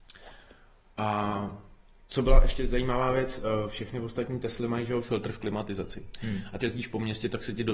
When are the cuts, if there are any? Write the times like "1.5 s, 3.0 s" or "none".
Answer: 6.6 s

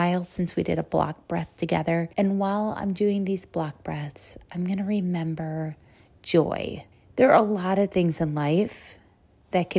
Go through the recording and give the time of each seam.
2.1 s, 6.9 s

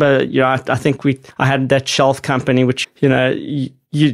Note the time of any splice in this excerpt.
1.3 s, 2.8 s

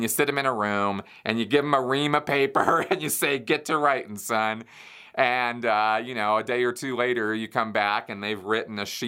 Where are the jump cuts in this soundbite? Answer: none

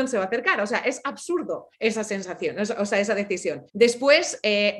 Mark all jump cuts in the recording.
1.7 s, 3.7 s

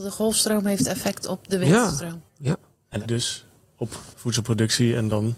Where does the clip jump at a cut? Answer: 2.3 s, 3.0 s, 4.1 s

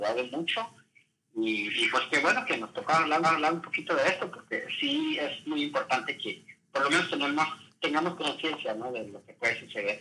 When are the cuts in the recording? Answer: 3.2 s

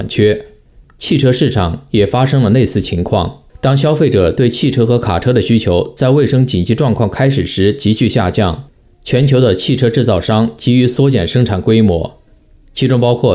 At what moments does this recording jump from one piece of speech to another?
3.5 s

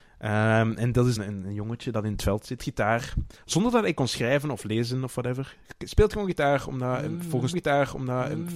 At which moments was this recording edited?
1.2 s, 2.6 s, 7.5 s

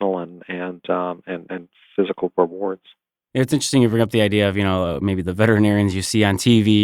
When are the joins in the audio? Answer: none

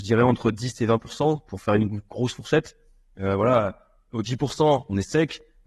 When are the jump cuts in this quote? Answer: none

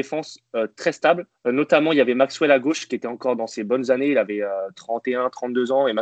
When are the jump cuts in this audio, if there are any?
1.3 s

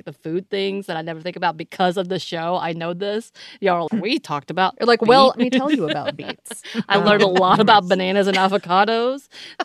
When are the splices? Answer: 3.9 s, 5.3 s

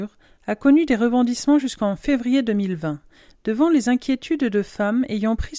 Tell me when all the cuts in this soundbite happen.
none

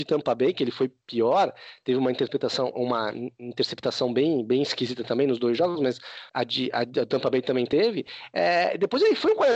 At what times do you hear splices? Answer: 6.3 s

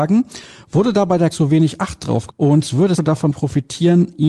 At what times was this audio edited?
1.3 s, 2.3 s, 3.0 s

